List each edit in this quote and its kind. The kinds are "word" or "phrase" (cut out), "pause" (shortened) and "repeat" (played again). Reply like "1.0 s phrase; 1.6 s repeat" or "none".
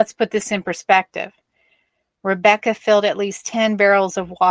none